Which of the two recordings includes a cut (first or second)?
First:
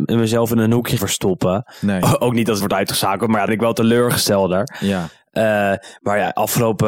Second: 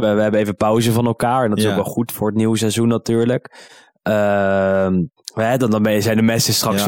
first